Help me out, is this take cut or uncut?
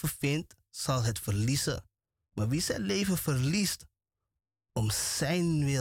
uncut